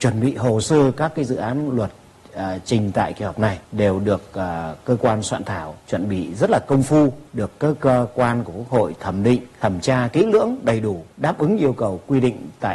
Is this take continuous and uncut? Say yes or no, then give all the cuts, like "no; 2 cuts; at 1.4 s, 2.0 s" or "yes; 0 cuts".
no; 5 cuts; at 3.6 s, 5.8 s, 7.3 s, 9.5 s, 11.1 s